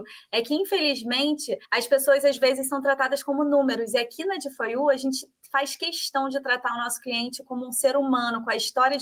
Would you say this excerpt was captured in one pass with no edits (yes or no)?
no